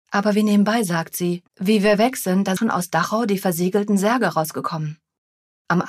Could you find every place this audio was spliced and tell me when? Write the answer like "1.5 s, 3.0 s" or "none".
1.5 s, 2.6 s